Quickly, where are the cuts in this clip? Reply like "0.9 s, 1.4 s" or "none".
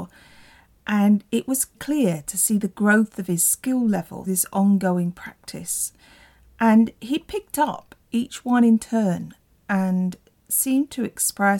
1.7 s, 4.3 s